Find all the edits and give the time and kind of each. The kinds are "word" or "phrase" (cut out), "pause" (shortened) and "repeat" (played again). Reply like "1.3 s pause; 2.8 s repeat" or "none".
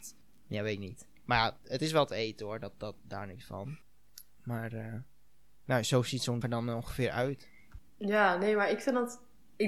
1.1 s pause; 6.4 s word; 7.9 s pause